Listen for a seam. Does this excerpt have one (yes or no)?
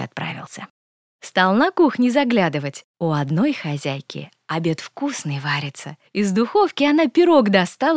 yes